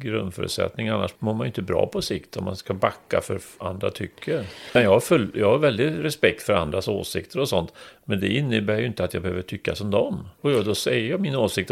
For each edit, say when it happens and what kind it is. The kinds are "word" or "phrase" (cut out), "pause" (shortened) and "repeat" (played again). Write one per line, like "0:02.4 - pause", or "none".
0:03.6 - word